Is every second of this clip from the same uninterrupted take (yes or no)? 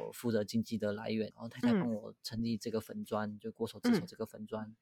no